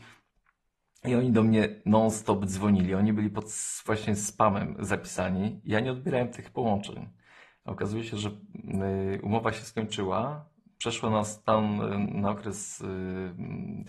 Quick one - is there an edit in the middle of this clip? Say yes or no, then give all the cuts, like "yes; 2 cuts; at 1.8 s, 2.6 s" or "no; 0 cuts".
no; 0 cuts